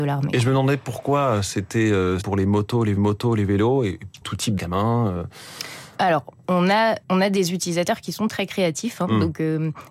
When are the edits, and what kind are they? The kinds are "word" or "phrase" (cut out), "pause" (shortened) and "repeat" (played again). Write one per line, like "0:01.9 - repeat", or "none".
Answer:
0:02.2 - word
0:03.0 - repeat
0:04.2 - phrase
0:04.6 - phrase
0:07.0 - pause